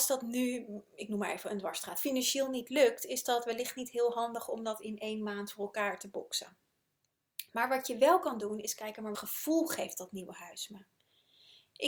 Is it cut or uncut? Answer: cut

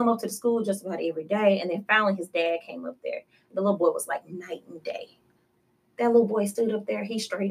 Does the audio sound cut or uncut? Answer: uncut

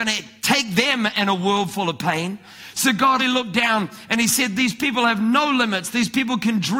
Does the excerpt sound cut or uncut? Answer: cut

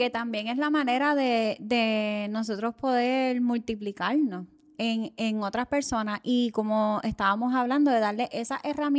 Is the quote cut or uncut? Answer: uncut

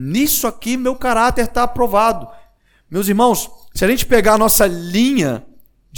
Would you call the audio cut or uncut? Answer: uncut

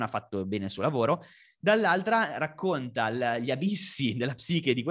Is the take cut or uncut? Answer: uncut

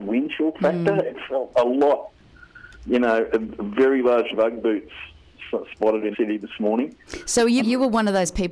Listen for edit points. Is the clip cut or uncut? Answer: cut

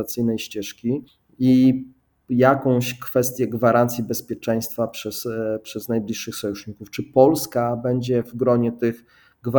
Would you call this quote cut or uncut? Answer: uncut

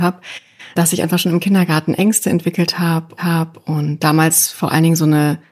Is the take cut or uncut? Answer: cut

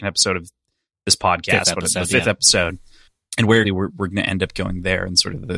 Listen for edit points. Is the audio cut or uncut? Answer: cut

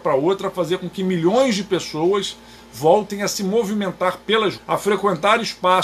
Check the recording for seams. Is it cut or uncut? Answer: cut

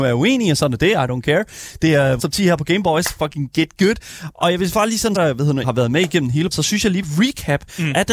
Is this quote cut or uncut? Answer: cut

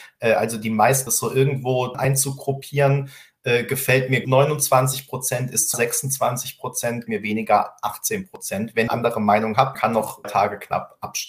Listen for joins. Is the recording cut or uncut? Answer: cut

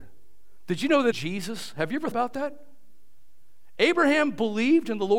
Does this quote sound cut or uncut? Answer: cut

